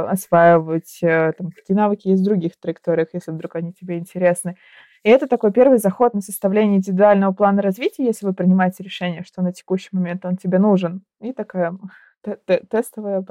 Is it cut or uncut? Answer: uncut